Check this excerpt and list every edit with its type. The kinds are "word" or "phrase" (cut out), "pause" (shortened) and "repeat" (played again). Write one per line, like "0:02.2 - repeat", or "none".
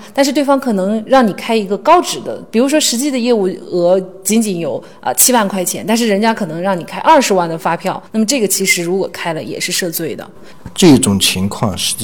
0:08.1 - pause